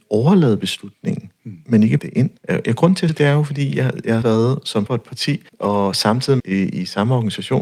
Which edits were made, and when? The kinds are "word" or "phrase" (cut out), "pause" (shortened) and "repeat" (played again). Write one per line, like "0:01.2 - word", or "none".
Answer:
0:02.0 - word
0:02.4 - pause
0:03.1 - word
0:04.2 - word
0:04.9 - word
0:05.5 - pause
0:06.4 - phrase